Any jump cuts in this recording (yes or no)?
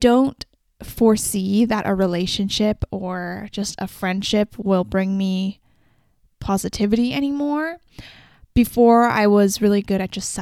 no